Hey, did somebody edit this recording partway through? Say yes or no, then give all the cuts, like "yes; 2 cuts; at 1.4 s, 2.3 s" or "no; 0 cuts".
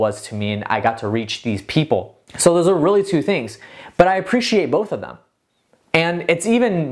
yes; 1 cut; at 2.3 s